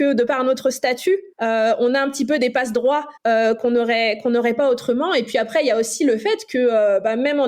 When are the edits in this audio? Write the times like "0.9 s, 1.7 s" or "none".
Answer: 1.3 s, 3.2 s